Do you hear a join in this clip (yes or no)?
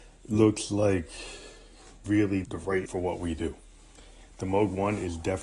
yes